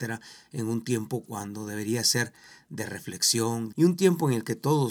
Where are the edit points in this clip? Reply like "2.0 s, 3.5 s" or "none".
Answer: 3.7 s